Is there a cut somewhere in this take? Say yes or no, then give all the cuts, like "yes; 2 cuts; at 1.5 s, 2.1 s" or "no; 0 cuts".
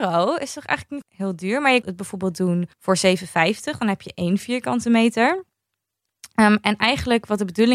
yes; 3 cuts; at 1.0 s, 1.8 s, 2.7 s